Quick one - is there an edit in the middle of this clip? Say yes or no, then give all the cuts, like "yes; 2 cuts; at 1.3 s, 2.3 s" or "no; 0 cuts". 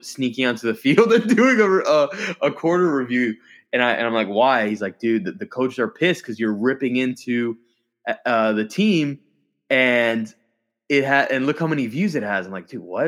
no; 0 cuts